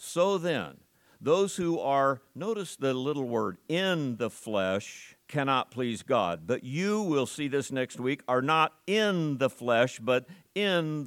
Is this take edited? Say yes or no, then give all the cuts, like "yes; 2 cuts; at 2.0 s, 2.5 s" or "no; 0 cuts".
yes; 1 cut; at 5.2 s